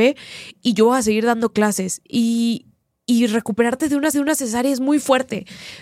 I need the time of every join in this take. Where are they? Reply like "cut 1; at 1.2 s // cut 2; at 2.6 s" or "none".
cut 1; at 4.1 s